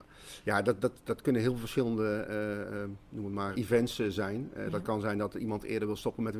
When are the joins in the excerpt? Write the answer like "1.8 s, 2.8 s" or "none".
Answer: 3.5 s